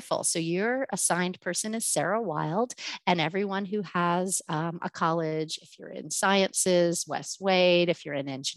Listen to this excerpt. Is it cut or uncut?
uncut